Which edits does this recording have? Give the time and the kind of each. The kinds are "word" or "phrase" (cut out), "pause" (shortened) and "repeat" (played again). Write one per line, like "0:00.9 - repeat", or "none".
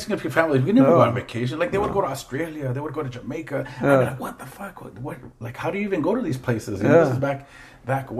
none